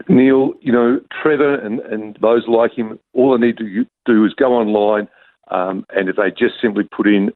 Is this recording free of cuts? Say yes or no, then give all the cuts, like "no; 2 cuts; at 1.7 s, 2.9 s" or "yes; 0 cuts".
no; 1 cut; at 2.1 s